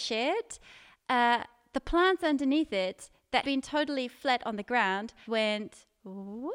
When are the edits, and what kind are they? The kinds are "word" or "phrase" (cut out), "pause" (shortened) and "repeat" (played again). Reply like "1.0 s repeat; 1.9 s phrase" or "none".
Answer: 3.4 s word; 5.2 s word